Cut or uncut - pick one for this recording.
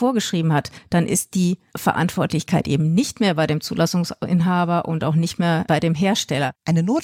uncut